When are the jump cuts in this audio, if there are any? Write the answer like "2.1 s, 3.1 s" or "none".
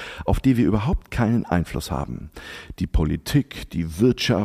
none